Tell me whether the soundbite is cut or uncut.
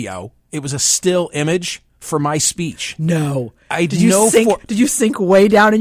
cut